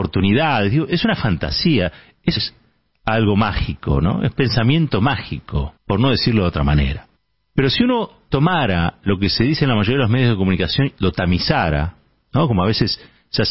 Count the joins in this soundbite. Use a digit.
4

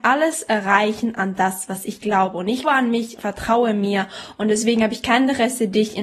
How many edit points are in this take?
2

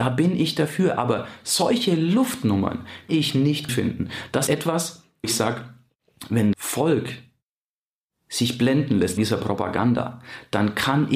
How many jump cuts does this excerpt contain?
6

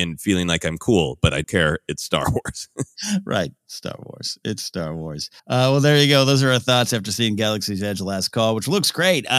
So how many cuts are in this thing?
3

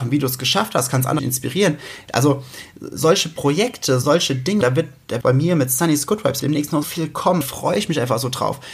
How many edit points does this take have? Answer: 7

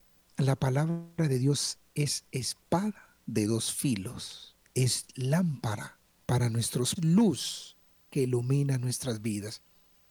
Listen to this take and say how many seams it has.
3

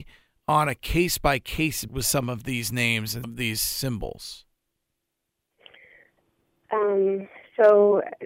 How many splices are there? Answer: 2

